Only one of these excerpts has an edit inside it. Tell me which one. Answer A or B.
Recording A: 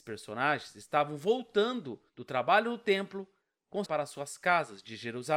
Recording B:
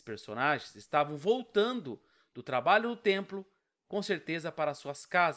A